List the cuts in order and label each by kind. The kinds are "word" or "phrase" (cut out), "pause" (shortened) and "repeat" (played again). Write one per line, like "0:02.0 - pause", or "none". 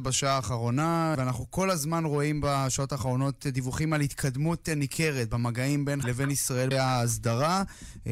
0:01.1 - word
0:06.0 - word
0:06.7 - word

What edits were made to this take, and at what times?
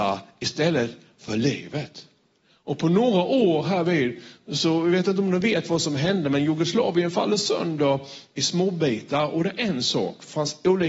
none

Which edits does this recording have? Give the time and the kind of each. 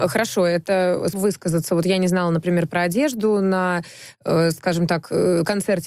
0:01.1 - word

